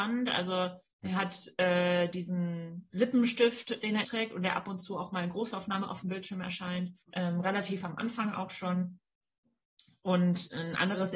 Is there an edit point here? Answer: yes; 2 cuts; at 4.0 s, 7.0 s

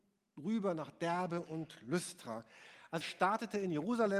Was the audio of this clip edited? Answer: yes; 1 cut; at 3.0 s

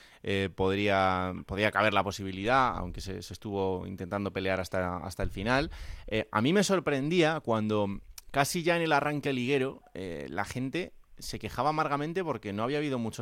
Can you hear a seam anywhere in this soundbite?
no; 0 cuts

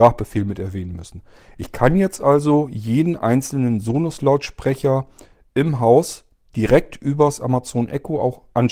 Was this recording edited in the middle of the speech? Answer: no; 0 cuts

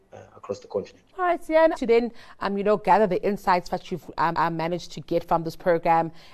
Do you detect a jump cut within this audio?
yes; 3 cuts; at 1.1 s, 1.7 s, 4.3 s

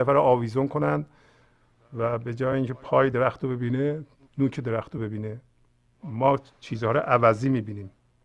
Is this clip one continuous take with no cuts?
yes; 0 cuts

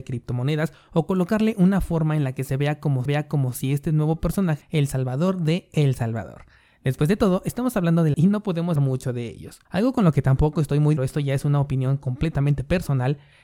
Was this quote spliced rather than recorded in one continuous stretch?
yes; 6 cuts; at 3.1 s, 4.6 s, 8.1 s, 8.8 s, 9.7 s, 11.0 s

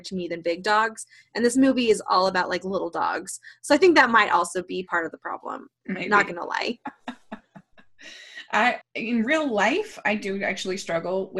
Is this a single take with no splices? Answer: no; 1 cut; at 8.8 s

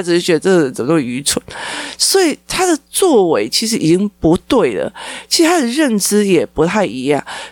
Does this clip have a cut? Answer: no; 0 cuts

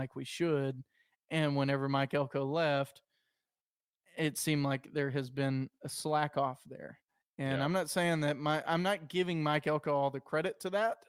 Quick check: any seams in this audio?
no; 0 cuts

